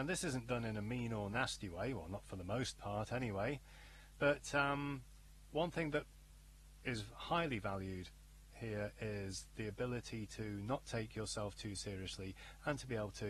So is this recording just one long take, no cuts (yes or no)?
yes